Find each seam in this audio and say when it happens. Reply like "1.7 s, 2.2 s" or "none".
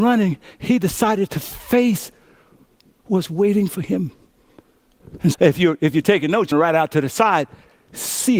3.0 s, 5.3 s, 6.5 s